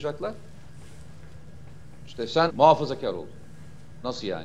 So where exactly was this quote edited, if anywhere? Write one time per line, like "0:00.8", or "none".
0:02.5